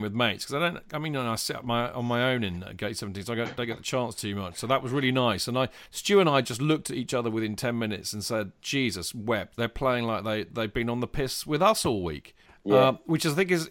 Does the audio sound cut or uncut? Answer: cut